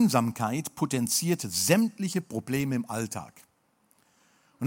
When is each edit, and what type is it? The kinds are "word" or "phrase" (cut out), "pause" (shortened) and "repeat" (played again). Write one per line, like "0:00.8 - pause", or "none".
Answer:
none